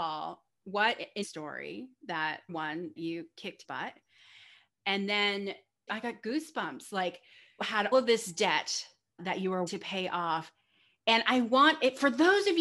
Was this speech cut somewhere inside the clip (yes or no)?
yes